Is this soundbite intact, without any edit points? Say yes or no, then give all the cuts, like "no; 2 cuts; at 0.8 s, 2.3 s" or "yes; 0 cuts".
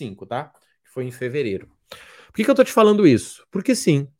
yes; 0 cuts